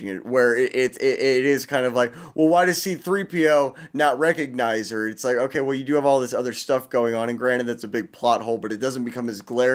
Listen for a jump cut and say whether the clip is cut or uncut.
uncut